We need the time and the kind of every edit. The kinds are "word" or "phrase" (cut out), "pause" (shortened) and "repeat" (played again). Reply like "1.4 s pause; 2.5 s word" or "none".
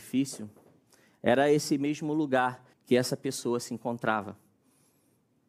2.7 s pause

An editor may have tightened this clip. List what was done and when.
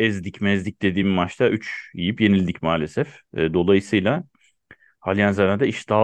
none

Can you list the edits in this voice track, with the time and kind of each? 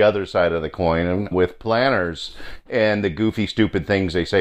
1.3 s word

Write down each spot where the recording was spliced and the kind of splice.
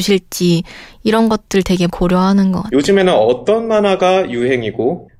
1.9 s word

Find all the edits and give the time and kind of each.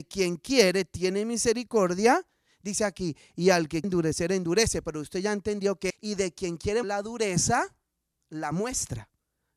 3.8 s word; 5.9 s word; 6.8 s word

